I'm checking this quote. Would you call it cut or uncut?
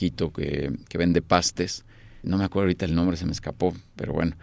cut